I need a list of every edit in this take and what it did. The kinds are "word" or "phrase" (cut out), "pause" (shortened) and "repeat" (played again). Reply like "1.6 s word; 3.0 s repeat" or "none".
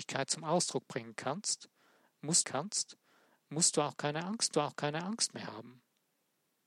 2.4 s repeat; 4.5 s repeat